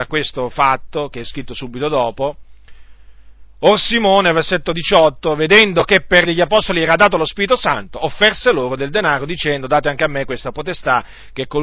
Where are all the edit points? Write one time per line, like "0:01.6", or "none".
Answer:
0:06.2